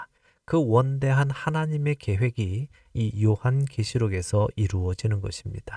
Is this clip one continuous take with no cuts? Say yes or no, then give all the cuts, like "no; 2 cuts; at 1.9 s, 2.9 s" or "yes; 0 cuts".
yes; 0 cuts